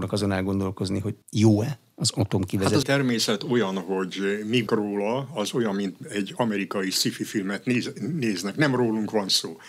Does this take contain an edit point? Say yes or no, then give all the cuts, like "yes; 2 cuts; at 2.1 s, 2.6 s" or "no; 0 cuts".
yes; 3 cuts; at 1.2 s, 2.8 s, 4.7 s